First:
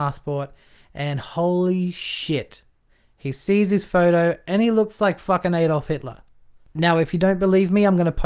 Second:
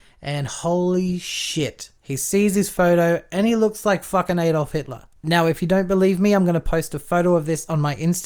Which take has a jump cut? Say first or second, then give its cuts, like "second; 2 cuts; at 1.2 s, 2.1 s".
second; 2 cuts; at 2.0 s, 5.2 s